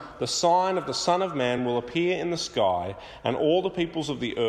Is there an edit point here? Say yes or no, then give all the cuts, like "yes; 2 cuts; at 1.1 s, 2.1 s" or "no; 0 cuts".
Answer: no; 0 cuts